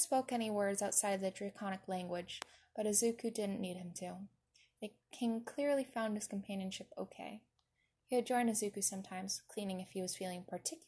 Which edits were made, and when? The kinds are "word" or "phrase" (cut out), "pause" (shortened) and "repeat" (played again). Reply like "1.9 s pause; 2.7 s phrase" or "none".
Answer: none